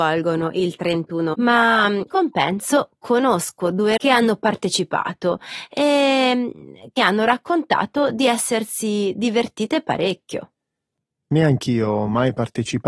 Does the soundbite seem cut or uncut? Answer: cut